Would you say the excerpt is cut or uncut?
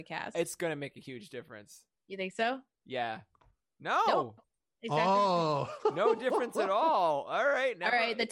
uncut